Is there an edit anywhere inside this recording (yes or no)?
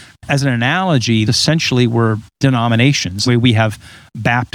yes